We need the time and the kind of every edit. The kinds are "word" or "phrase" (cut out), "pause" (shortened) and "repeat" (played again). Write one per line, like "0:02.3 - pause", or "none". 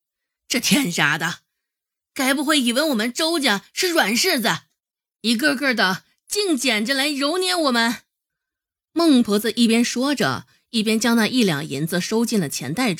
none